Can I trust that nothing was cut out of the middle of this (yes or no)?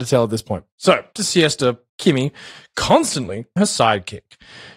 no